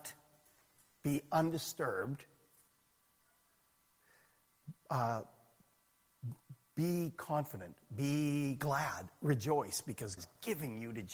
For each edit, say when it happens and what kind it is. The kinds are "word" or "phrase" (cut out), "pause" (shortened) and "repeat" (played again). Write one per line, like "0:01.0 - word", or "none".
0:10.2 - word